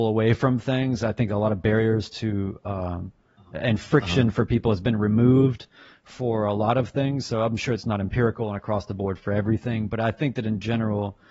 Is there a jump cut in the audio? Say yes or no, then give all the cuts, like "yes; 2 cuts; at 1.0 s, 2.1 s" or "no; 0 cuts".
no; 0 cuts